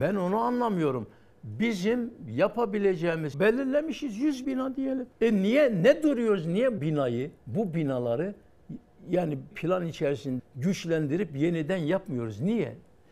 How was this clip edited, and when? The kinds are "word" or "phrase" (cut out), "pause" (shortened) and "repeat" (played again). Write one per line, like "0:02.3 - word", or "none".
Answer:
0:03.3 - phrase
0:04.4 - word
0:05.1 - pause
0:06.8 - word
0:07.4 - pause
0:09.5 - phrase
0:10.4 - word